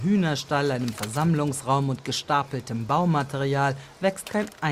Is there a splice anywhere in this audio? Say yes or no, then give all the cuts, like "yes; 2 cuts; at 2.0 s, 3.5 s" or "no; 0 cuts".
no; 0 cuts